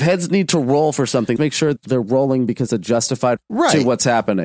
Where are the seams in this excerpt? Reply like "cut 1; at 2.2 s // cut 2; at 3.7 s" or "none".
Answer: cut 1; at 1.4 s // cut 2; at 1.8 s // cut 3; at 2.7 s // cut 4; at 3.4 s